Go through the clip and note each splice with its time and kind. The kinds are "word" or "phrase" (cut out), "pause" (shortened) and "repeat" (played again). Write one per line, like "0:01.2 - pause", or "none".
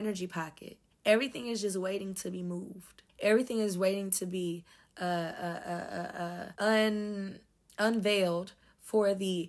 0:00.9 - pause
0:03.1 - pause
0:06.5 - pause